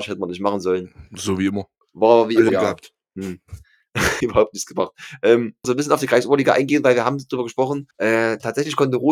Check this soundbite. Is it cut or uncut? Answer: cut